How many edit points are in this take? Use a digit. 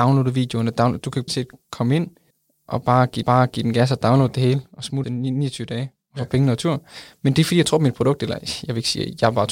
4